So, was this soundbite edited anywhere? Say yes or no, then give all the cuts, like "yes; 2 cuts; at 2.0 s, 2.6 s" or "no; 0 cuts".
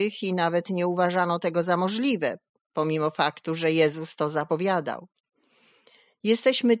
no; 0 cuts